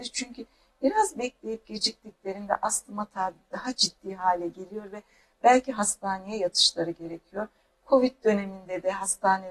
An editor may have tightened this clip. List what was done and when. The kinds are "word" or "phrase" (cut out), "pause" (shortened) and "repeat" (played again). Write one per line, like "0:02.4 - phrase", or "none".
none

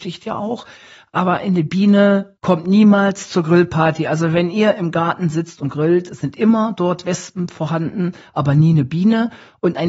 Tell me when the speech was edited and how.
none

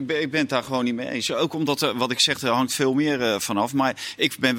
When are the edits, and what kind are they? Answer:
none

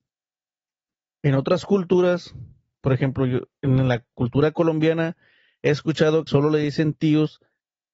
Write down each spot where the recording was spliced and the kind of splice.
0:06.3 - word

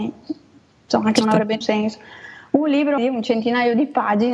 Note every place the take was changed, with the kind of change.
0:01.2 - word
0:01.6 - word
0:03.0 - word

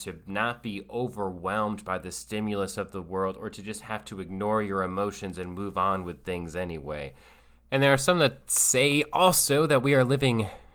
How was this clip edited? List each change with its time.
none

